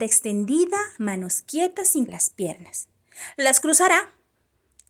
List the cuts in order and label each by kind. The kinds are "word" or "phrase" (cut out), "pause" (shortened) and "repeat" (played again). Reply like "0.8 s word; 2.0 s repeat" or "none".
1.0 s word; 2.1 s word